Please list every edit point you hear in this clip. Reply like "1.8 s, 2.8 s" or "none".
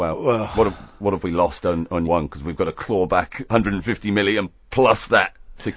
2.0 s